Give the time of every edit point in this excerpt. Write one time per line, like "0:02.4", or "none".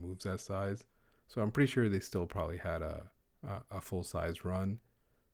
0:03.2